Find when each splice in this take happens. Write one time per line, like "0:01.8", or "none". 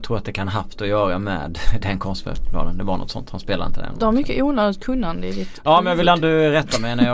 none